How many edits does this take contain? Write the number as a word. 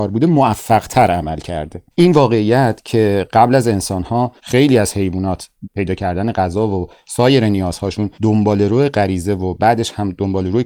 four